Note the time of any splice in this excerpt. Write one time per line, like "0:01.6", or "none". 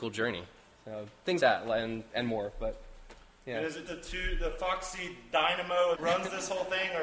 0:01.4
0:03.9
0:05.9